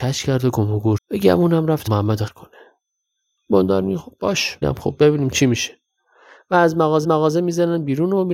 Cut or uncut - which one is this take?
cut